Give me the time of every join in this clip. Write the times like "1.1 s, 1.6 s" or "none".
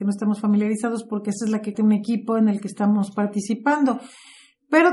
1.7 s